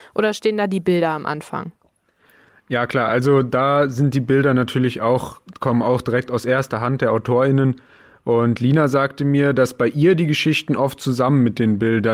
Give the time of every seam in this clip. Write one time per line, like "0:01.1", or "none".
none